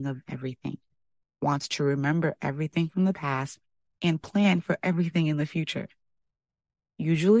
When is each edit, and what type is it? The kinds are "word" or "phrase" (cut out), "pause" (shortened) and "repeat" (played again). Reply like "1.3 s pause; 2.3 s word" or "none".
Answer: none